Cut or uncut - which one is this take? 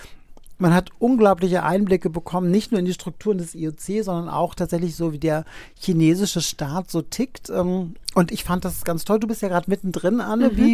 uncut